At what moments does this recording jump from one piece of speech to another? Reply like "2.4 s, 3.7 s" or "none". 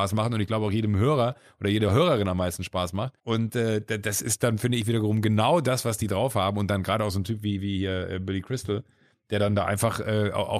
3.2 s

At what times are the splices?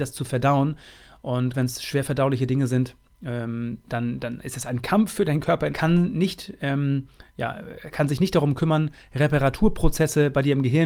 1.5 s, 5.7 s

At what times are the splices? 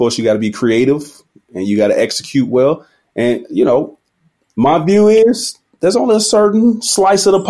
none

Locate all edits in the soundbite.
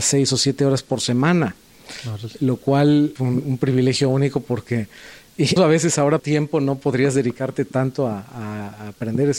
3.2 s, 5.6 s, 6.2 s

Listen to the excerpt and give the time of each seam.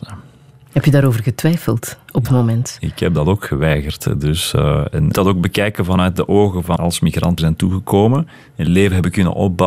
2.2 s, 5.1 s, 6.8 s, 7.4 s

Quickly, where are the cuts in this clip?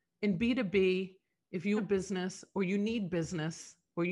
1.8 s

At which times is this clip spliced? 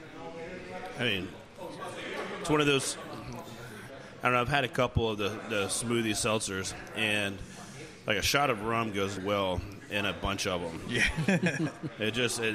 9.2 s

